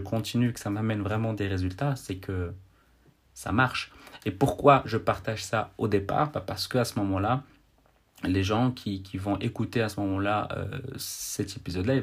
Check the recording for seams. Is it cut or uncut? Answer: uncut